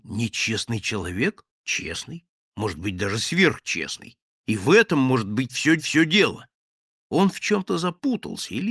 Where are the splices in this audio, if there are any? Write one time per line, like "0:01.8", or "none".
0:01.5
0:05.8